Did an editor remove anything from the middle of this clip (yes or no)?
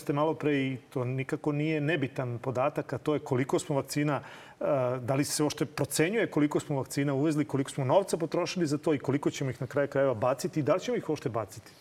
no